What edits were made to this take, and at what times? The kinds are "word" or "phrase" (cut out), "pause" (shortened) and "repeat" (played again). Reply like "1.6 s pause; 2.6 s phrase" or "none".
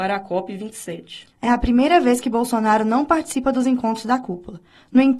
1.3 s pause

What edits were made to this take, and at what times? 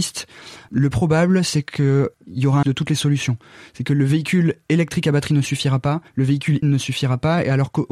0.9 s word; 2.6 s phrase; 6.1 s pause; 6.6 s word

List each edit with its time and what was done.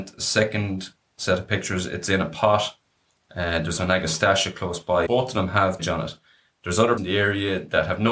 3.8 s word; 5.1 s word; 5.8 s word; 7.0 s word

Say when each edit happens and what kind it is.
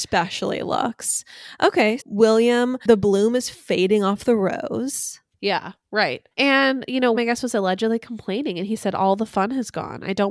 2.0 s word; 6.3 s pause; 7.1 s word

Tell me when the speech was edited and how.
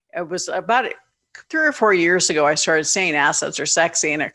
1.5 s pause

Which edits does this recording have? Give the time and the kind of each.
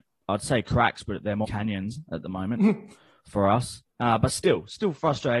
1.4 s word; 3.9 s pause

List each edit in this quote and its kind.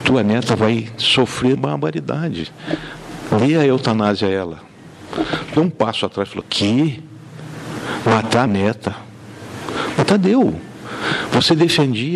1.6 s word; 5.6 s phrase; 6.4 s word; 8.5 s word

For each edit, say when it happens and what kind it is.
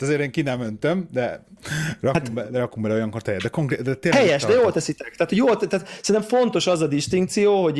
none

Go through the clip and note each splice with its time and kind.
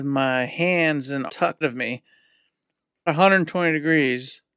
1.3 s word; 1.6 s word; 3.1 s word

